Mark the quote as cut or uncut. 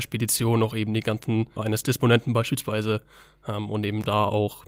cut